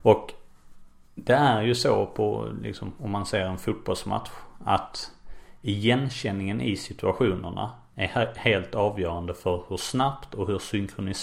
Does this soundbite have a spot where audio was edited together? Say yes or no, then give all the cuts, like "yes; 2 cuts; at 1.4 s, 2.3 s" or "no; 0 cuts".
no; 0 cuts